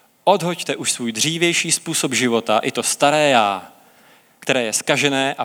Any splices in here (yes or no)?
no